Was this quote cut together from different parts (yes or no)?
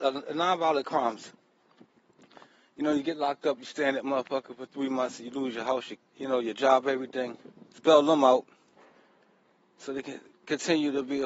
yes